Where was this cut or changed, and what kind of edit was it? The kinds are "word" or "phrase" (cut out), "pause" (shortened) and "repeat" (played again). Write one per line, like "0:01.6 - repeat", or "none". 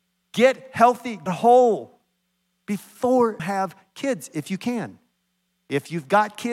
0:01.3 - word
0:03.4 - word